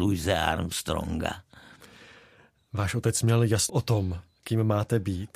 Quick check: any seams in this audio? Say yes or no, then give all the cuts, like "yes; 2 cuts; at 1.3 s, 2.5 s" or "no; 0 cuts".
yes; 1 cut; at 3.7 s